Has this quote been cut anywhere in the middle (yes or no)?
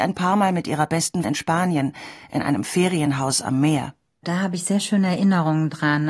yes